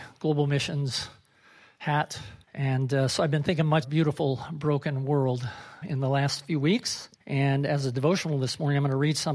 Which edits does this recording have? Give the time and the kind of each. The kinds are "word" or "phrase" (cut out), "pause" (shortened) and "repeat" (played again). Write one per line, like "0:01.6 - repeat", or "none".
0:02.4 - pause
0:03.8 - phrase
0:05.8 - word
0:07.1 - pause

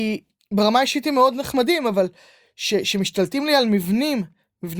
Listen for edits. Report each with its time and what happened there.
none

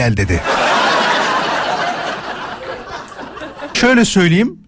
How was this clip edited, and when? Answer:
0:03.7 - word

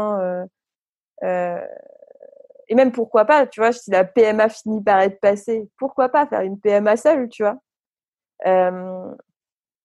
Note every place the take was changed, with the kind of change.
none

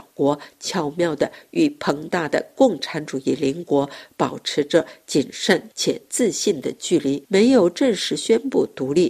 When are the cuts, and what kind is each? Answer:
0:07.2 - pause

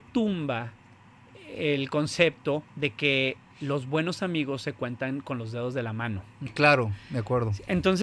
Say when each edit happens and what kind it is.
0:02.7 - pause

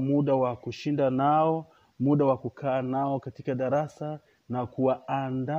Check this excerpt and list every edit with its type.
none

